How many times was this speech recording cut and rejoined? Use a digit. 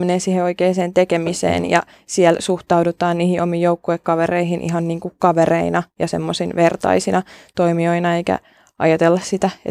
0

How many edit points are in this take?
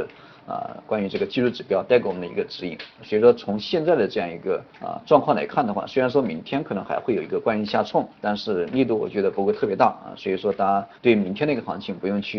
3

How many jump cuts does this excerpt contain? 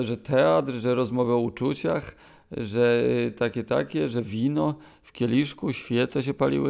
0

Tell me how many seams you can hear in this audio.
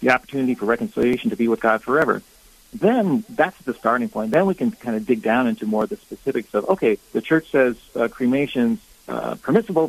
1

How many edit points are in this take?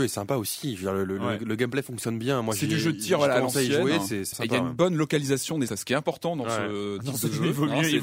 2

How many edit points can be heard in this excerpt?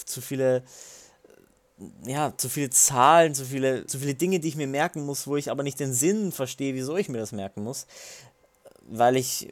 1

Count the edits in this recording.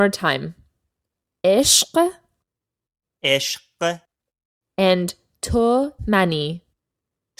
1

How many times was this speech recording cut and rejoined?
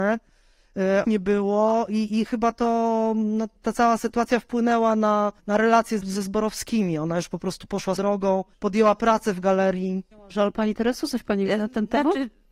7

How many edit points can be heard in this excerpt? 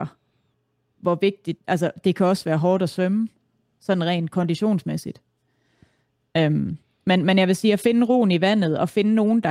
0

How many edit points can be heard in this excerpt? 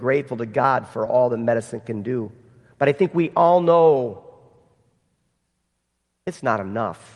0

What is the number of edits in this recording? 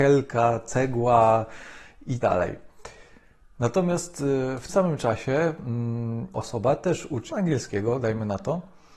4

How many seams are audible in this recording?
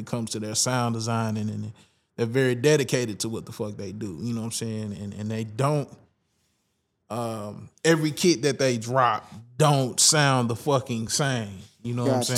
0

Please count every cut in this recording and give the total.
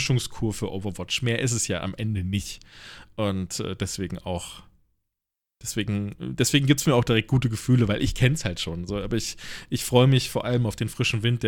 0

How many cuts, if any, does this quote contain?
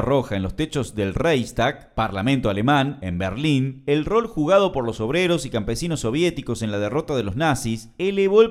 0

